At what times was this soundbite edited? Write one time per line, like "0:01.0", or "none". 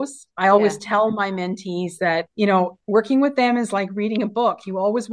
0:02.3